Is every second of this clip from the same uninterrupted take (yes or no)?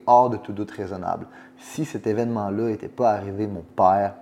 yes